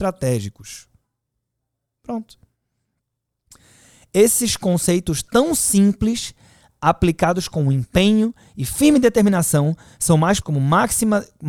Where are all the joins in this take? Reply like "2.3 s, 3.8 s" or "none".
10.4 s